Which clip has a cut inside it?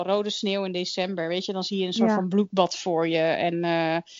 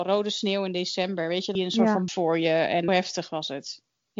second; 3 cuts; at 1.6 s, 2.1 s, 2.9 s

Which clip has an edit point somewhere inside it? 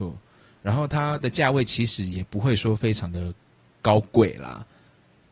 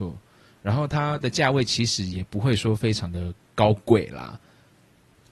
second; 1 cut; at 3.4 s

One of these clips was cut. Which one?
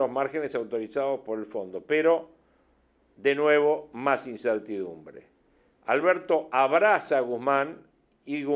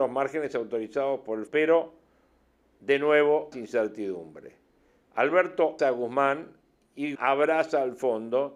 second; 4 cuts; at 1.5 s, 3.5 s, 5.8 s, 7.1 s

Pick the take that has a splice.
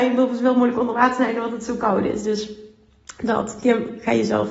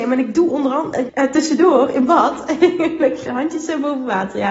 second; 2 cuts; at 1.1 s, 3.3 s

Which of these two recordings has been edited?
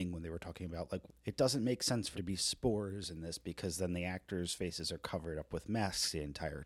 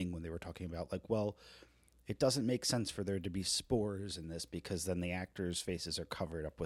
first; 2 cuts; at 1.1 s, 2.1 s

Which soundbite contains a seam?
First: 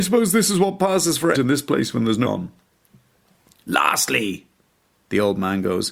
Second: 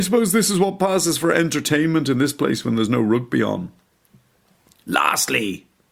first; 2 cuts; at 1.3 s, 2.2 s

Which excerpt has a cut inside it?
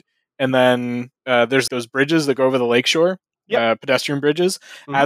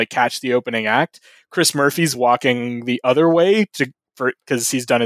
first; 2 cuts; at 1.2 s, 1.7 s

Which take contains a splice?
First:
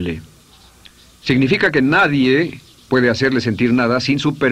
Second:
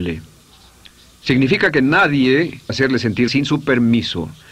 second; 2 cuts; at 2.7 s, 3.3 s

